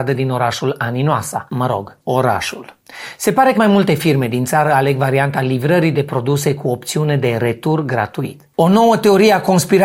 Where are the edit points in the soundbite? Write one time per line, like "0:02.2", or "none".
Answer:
0:01.5
0:03.5